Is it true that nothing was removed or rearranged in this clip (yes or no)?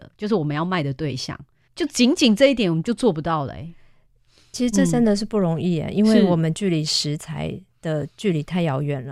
no